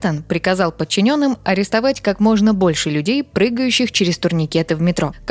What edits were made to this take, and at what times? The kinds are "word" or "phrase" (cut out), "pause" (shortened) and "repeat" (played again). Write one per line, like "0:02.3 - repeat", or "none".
none